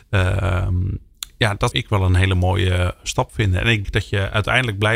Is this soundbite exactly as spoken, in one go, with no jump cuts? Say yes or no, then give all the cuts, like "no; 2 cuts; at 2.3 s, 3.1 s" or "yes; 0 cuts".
no; 2 cuts; at 1.7 s, 3.8 s